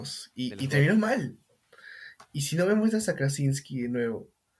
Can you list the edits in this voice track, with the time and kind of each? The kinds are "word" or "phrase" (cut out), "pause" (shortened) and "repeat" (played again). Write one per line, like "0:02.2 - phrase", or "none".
none